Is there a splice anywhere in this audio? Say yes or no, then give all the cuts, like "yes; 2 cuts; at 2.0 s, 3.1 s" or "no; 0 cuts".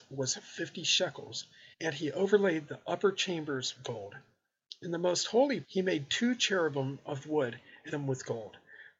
yes; 4 cuts; at 1.7 s, 3.8 s, 5.6 s, 7.9 s